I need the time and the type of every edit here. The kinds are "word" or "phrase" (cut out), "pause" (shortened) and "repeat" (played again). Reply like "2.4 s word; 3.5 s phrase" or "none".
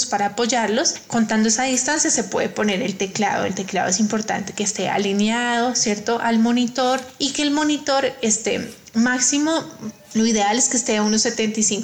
none